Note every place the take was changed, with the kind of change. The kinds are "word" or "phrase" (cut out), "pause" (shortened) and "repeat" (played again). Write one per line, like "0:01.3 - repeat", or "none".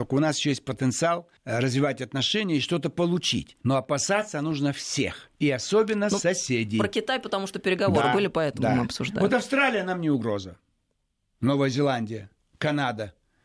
0:01.4 - pause
0:03.6 - pause
0:05.3 - pause

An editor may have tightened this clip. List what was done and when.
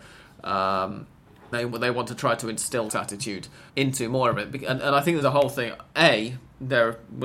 0:01.5 - word
0:02.9 - word
0:03.7 - pause
0:05.2 - word

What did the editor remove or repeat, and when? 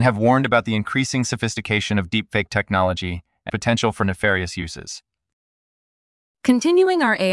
0:03.5 - word

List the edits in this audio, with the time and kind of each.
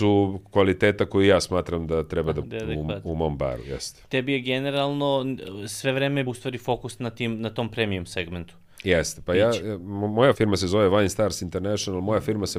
0:02.4 - word
0:06.3 - word
0:10.3 - word

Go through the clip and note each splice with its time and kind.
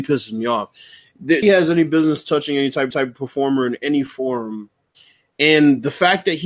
0:01.4 - word
0:02.9 - repeat

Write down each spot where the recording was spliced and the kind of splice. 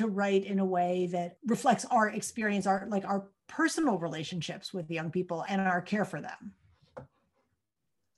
none

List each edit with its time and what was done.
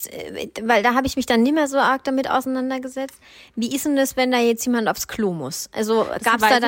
none

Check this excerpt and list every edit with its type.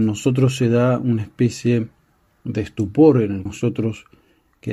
0:03.5 - word

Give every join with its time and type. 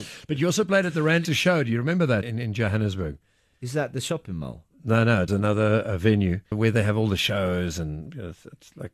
0:01.2 - word
0:02.2 - word
0:05.3 - word
0:06.5 - word

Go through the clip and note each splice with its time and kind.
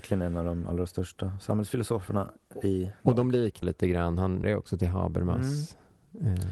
0:03.6 - word
0:04.4 - word

